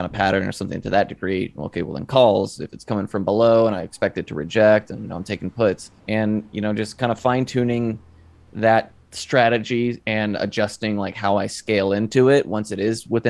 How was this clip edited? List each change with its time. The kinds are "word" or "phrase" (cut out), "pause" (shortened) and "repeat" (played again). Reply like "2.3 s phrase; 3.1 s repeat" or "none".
6.0 s pause; 9.0 s pause